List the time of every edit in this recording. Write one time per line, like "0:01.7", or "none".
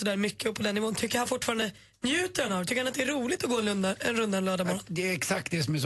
none